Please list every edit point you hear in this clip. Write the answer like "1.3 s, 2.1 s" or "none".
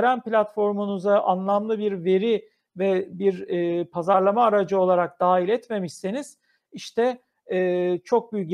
none